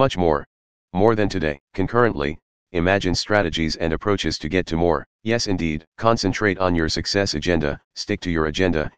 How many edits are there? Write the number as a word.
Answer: four